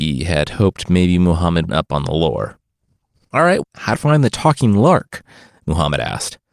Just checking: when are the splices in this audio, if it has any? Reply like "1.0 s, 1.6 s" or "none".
1.7 s, 3.6 s, 4.0 s